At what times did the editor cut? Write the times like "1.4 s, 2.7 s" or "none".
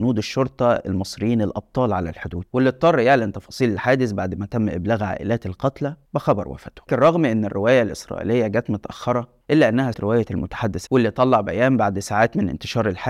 2.5 s, 6.1 s, 6.9 s, 9.4 s, 9.9 s, 10.9 s